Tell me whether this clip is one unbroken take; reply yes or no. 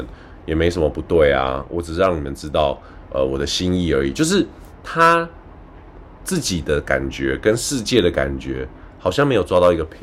yes